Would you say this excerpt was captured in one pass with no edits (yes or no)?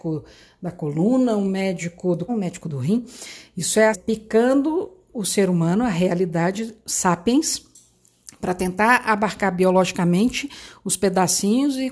no